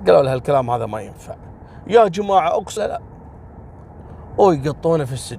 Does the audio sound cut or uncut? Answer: cut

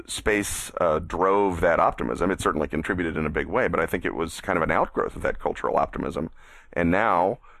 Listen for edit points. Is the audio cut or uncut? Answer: uncut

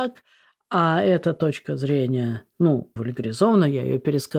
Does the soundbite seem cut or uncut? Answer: cut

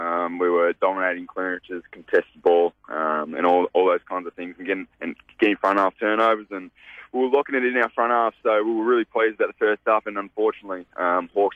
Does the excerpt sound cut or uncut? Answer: cut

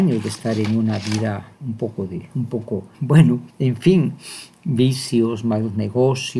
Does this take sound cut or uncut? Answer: cut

